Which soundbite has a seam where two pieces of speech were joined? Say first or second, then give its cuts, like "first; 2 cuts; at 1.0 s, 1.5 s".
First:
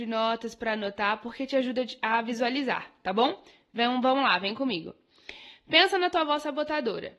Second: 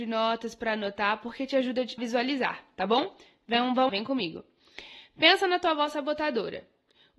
second; 2 cuts; at 2.0 s, 3.9 s